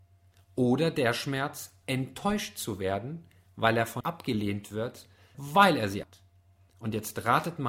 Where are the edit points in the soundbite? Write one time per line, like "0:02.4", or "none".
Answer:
0:04.0
0:05.3
0:06.0

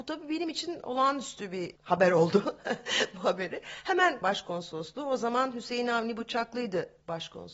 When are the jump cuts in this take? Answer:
0:04.2

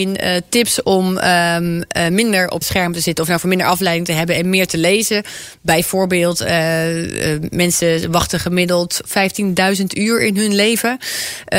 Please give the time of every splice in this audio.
0:02.6

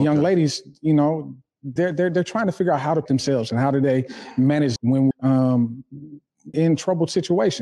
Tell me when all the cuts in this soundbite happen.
0:01.8
0:03.1
0:04.8
0:05.1
0:06.5

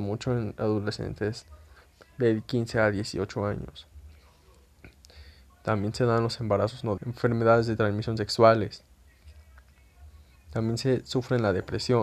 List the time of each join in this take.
0:07.0

